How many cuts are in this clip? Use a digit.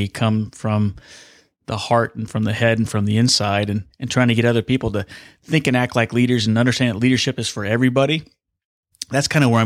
0